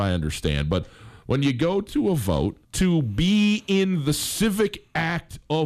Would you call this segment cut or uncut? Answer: cut